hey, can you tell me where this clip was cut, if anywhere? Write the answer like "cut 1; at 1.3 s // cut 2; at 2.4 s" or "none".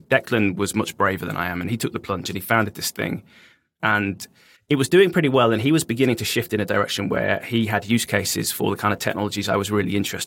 cut 1; at 4.6 s